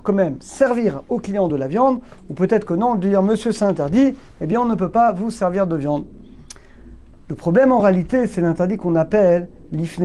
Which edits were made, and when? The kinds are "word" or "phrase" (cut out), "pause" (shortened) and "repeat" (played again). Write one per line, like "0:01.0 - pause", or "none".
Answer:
none